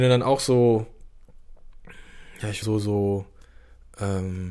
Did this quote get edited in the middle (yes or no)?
yes